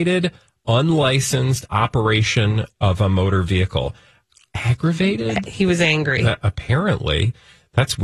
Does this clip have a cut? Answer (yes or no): no